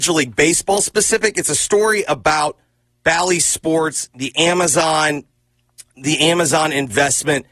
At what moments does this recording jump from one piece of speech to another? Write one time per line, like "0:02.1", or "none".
none